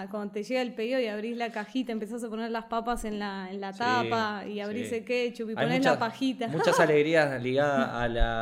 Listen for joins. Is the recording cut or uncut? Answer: uncut